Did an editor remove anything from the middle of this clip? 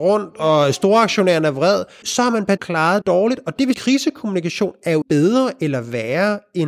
yes; 5 cuts; at 2.0 s, 2.6 s, 3.0 s, 3.7 s, 5.0 s

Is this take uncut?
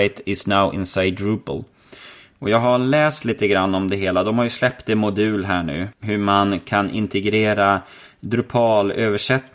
no; 1 cut; at 5.9 s

